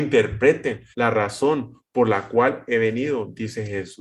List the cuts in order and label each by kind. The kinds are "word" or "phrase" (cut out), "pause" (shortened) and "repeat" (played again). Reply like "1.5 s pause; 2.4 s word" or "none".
0.9 s pause